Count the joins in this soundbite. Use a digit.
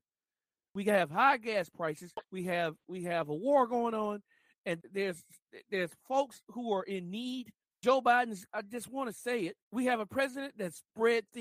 5